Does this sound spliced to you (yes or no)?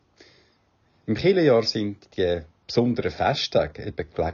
no